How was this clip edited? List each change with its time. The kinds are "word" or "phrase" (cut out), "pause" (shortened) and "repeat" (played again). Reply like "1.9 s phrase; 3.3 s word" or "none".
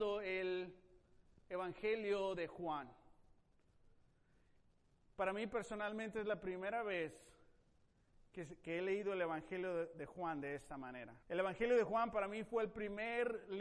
11.2 s pause